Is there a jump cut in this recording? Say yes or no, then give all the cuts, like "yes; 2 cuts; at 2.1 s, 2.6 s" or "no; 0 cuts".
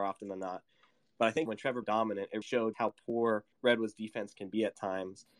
yes; 5 cuts; at 1.5 s, 1.8 s, 2.4 s, 2.7 s, 3.5 s